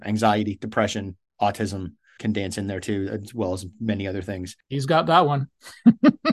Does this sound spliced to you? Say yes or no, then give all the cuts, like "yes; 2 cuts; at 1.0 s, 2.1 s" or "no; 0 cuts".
yes; 1 cut; at 2.2 s